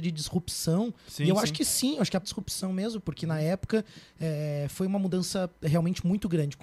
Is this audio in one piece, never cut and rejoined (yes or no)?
no